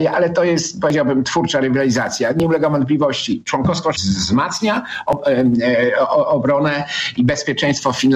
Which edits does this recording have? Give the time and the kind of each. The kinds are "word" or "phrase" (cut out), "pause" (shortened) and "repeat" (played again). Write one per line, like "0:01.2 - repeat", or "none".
0:03.9 - word

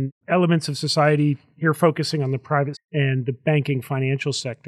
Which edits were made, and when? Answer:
0:02.7 - word

